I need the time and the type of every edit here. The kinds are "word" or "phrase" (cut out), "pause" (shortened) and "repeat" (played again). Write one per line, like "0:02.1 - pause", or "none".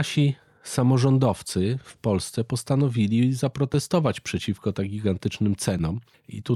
none